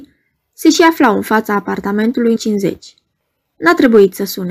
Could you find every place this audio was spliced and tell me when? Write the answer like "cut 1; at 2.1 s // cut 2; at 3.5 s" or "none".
cut 1; at 2.4 s